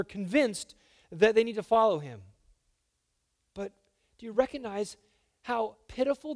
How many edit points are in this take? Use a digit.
0